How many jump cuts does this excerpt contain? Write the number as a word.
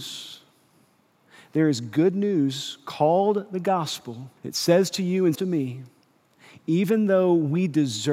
two